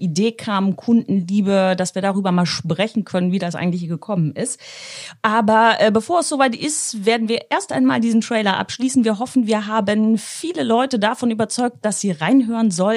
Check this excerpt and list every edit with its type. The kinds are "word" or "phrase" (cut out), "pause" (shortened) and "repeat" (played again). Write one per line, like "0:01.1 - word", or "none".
none